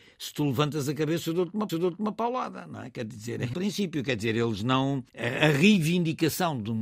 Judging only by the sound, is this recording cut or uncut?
cut